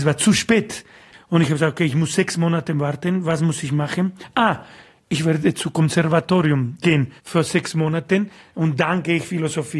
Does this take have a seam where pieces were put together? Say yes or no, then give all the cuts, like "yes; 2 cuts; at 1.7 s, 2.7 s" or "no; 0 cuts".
yes; 1 cut; at 7.2 s